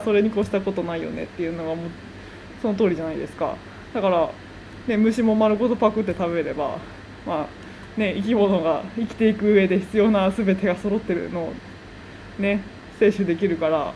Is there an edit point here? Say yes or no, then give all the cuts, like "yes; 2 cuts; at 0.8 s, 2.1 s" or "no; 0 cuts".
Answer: no; 0 cuts